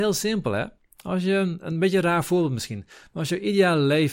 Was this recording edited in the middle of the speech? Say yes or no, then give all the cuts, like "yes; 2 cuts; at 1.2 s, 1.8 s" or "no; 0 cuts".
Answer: no; 0 cuts